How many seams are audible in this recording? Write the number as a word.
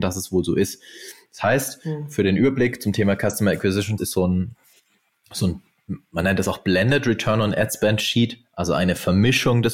one